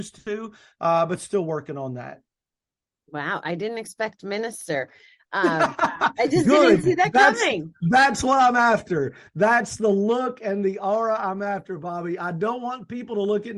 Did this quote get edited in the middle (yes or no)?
no